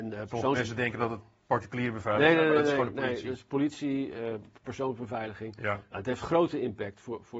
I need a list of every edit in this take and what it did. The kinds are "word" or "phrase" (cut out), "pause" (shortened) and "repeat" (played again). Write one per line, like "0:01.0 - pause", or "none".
none